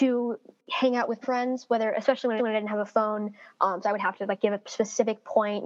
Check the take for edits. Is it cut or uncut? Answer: cut